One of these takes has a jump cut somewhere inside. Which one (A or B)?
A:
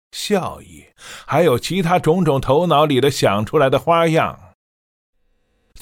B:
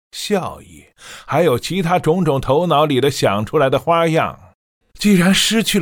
B